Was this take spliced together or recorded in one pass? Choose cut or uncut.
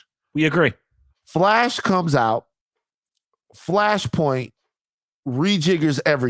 uncut